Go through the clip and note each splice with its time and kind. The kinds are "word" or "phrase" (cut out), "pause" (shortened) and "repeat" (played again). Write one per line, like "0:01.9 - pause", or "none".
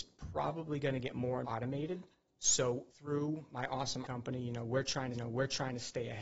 0:01.4 - word
0:02.9 - pause
0:04.0 - word
0:05.1 - repeat